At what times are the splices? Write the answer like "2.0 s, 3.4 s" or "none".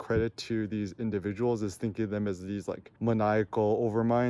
3.0 s